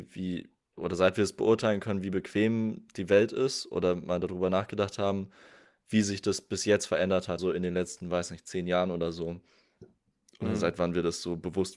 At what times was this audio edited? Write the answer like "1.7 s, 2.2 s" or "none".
7.4 s